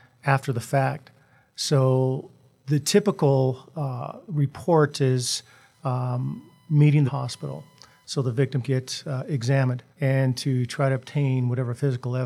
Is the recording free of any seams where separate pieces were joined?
no; 4 cuts; at 2.6 s, 7.1 s, 8.6 s, 9.9 s

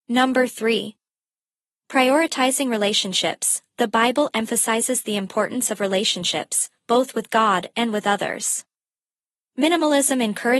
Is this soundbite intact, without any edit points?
yes; 0 cuts

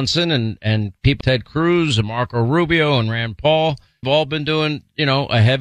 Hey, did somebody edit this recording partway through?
yes; 2 cuts; at 1.2 s, 4.0 s

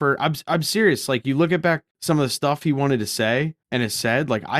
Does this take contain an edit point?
yes; 2 cuts; at 1.9 s, 3.6 s

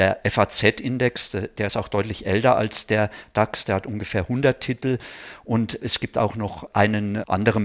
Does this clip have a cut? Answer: no; 0 cuts

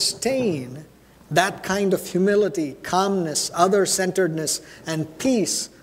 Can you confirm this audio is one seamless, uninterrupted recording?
yes; 0 cuts

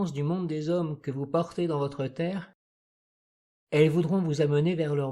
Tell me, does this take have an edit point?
no; 0 cuts

